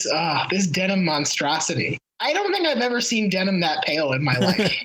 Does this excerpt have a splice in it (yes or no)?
yes